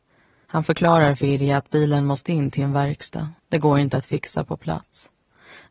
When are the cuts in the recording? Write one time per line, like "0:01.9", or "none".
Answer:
0:03.4